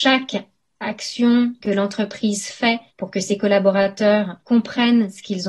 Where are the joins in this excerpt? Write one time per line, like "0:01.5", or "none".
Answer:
0:01.6
0:02.9
0:04.4